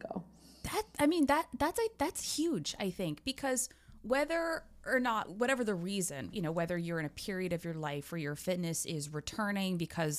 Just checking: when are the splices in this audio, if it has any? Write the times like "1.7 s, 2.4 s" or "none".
5.3 s, 6.3 s